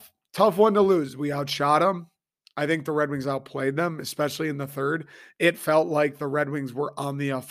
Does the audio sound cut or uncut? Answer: uncut